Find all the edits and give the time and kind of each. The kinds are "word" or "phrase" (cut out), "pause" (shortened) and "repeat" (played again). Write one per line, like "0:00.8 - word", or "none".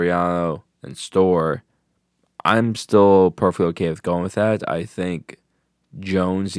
none